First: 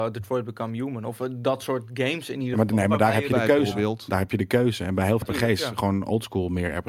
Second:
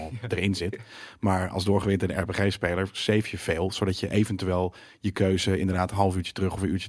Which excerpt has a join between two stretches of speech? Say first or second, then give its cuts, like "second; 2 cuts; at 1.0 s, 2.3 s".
first; 1 cut; at 5.2 s